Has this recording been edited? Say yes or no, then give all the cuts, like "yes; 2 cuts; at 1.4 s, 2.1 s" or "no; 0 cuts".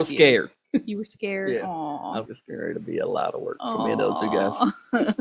yes; 1 cut; at 2.3 s